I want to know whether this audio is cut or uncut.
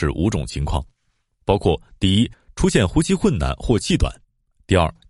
uncut